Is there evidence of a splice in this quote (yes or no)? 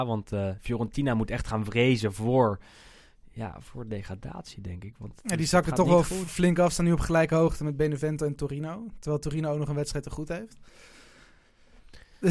no